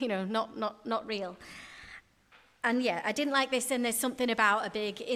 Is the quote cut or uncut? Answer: uncut